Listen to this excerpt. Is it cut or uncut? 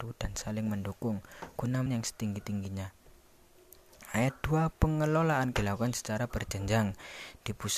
cut